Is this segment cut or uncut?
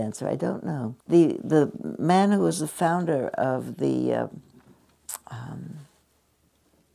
cut